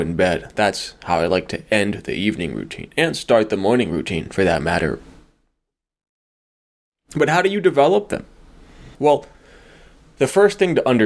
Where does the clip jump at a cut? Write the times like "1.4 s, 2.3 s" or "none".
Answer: 8.9 s